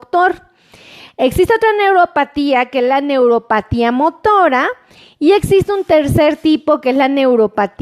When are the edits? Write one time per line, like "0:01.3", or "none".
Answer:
none